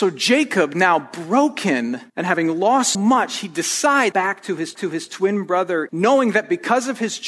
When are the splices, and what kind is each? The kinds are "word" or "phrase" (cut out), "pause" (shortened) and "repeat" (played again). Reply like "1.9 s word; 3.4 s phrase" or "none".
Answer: 2.1 s pause; 2.9 s word; 4.1 s phrase; 4.8 s repeat; 5.9 s word

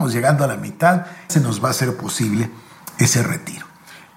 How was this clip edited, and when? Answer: 1.3 s word

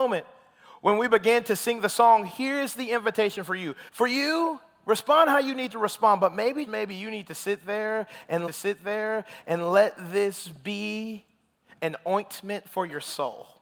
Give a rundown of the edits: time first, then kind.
3.9 s pause; 6.7 s word; 8.5 s repeat

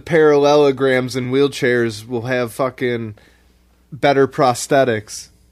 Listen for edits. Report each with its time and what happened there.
none

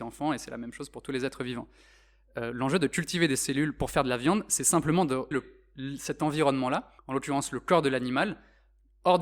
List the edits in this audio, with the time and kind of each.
5.3 s word; 7.0 s pause

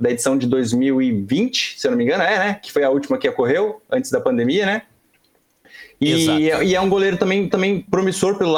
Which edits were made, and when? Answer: 7.5 s repeat

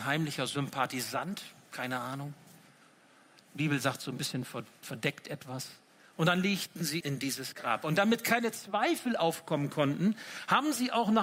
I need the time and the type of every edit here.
7.0 s word

